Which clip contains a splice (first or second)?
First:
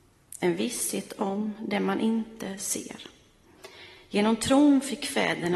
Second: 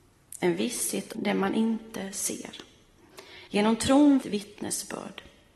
second